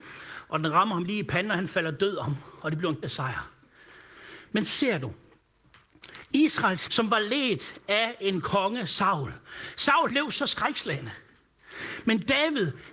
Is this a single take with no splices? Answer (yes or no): no